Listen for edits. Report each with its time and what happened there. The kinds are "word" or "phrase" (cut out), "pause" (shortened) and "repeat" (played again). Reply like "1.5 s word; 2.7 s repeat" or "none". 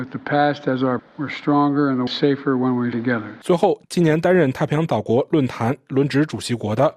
1.0 s word; 2.1 s phrase; 2.9 s word; 3.4 s pause